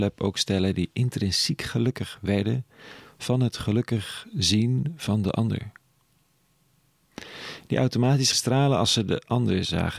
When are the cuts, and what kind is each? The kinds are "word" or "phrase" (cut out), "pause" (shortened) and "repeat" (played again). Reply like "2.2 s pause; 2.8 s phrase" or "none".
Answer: 8.3 s word